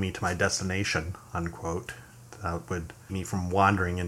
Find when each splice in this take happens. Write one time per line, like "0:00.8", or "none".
0:03.1